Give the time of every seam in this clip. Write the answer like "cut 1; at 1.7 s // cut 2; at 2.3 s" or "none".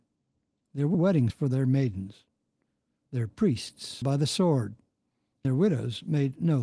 cut 1; at 0.9 s // cut 2; at 1.3 s // cut 3; at 4.0 s // cut 4; at 5.4 s